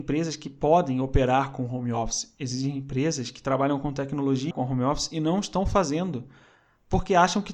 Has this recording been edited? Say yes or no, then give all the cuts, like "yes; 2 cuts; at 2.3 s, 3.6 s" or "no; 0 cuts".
yes; 1 cut; at 4.5 s